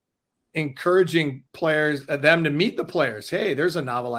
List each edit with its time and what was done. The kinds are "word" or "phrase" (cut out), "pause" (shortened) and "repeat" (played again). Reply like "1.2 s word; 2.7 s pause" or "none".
1.5 s pause